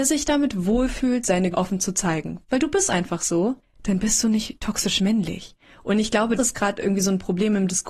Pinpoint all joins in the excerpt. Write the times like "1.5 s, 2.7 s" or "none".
1.5 s, 3.6 s, 6.4 s